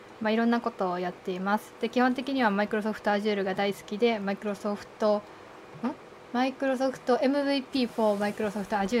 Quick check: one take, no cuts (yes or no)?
yes